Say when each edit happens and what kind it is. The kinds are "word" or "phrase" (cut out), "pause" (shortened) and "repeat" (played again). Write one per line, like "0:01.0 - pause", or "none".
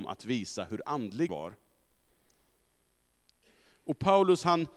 0:01.3 - word